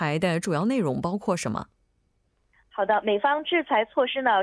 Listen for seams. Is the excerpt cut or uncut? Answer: uncut